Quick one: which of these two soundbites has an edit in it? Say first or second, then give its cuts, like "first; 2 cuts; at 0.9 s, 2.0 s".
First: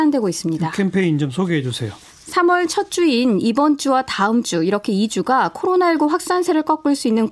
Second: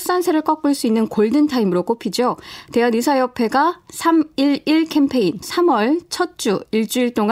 second; 1 cut; at 5.4 s